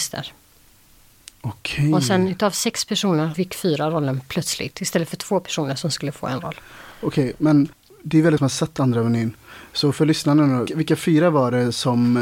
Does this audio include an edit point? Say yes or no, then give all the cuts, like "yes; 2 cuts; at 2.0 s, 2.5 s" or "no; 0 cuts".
yes; 3 cuts; at 3.3 s, 8.4 s, 10.7 s